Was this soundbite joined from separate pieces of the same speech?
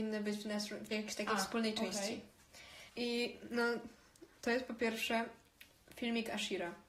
yes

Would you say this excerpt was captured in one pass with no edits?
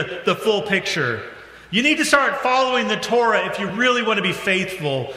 yes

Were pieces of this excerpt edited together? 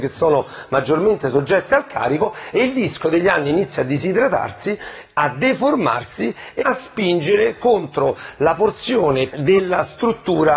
yes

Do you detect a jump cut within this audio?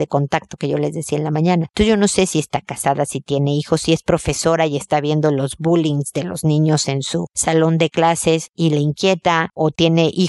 no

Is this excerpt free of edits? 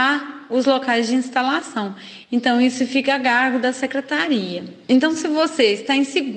no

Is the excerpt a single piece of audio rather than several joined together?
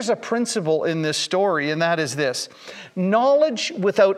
yes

